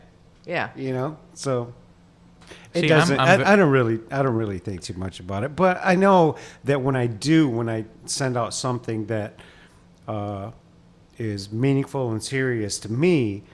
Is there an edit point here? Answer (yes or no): no